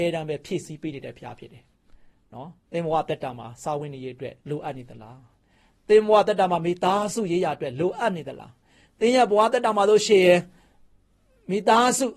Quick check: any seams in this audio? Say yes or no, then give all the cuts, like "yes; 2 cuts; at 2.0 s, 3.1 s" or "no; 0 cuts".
yes; 2 cuts; at 2.6 s, 4.4 s